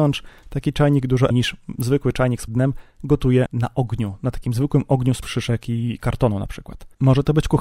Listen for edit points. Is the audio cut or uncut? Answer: cut